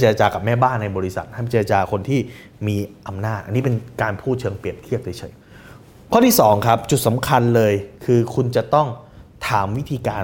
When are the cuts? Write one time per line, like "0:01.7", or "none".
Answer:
0:05.4
0:07.9